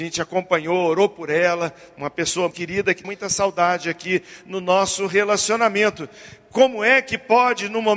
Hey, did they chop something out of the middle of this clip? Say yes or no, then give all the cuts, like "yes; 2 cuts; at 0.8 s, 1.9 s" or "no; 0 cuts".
yes; 2 cuts; at 2.5 s, 3.0 s